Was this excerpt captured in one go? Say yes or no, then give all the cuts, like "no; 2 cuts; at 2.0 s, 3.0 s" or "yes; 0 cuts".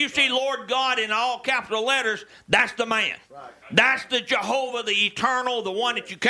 no; 2 cuts; at 3.2 s, 3.6 s